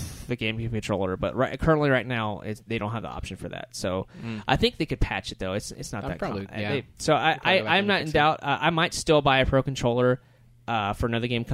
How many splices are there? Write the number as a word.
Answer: one